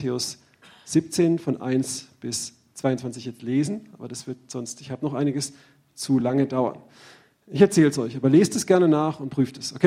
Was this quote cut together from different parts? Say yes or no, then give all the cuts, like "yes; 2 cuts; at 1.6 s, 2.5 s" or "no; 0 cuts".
no; 0 cuts